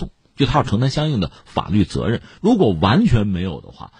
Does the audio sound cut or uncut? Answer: uncut